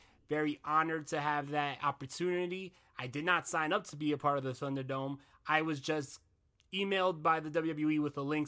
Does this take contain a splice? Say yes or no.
no